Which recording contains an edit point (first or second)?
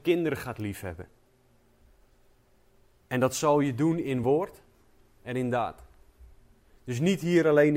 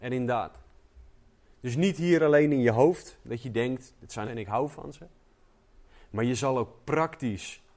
second